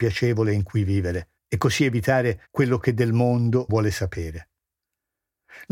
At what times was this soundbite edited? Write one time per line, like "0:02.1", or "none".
0:01.4
0:02.5
0:03.7